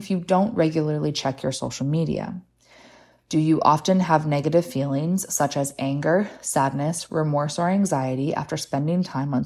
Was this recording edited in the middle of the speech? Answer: no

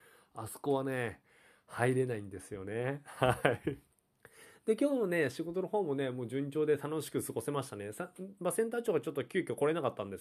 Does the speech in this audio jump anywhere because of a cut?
yes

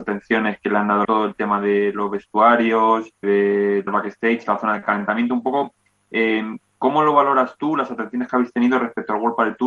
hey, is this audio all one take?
no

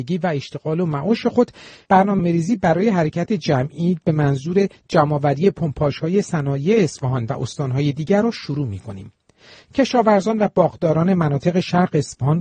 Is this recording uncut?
yes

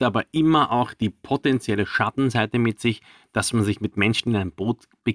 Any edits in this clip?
no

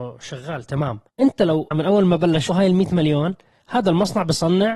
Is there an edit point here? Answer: yes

